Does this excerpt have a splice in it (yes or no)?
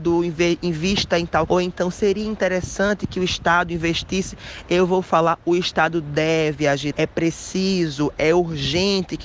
yes